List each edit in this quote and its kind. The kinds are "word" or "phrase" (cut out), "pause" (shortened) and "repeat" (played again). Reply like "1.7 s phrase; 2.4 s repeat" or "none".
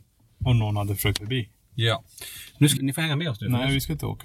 1.2 s word; 2.8 s word